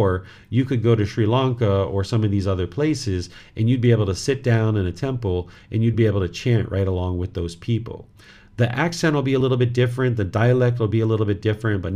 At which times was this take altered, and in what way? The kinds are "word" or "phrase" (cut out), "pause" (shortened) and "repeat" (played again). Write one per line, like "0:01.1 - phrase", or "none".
none